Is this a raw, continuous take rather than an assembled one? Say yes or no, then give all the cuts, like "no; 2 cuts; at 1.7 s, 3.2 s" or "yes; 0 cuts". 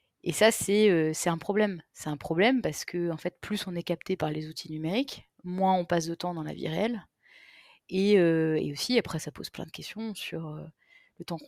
yes; 0 cuts